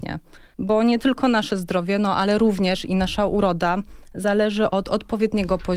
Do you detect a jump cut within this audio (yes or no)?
no